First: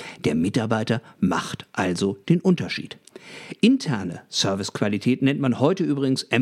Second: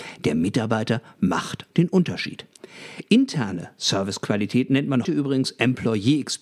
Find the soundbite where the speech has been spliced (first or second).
second